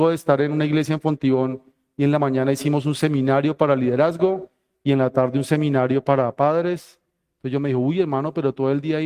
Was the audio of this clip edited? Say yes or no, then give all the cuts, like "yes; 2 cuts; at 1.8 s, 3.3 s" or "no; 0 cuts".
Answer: no; 0 cuts